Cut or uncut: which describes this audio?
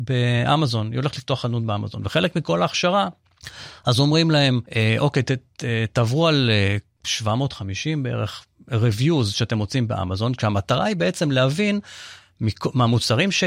cut